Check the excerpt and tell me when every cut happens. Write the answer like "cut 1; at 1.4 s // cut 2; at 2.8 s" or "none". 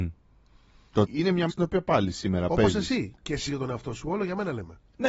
cut 1; at 1.1 s // cut 2; at 1.5 s // cut 3; at 3.5 s